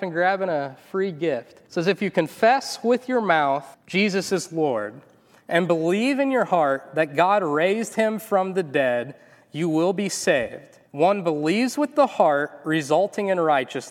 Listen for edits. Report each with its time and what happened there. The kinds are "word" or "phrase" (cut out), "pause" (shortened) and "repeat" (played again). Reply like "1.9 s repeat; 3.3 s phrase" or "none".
1.7 s pause; 3.7 s pause; 10.9 s pause